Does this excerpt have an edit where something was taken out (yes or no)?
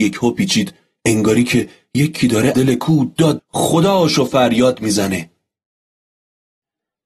yes